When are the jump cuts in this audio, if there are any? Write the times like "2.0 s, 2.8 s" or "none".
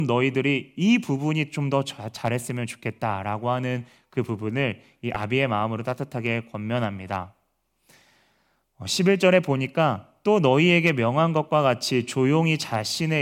none